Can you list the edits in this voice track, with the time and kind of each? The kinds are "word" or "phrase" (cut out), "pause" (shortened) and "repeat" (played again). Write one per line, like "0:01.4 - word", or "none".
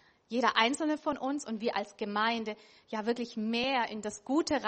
none

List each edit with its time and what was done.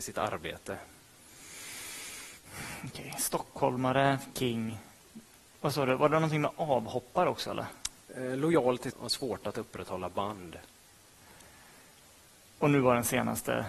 0:04.3 - word
0:05.4 - pause
0:08.9 - phrase

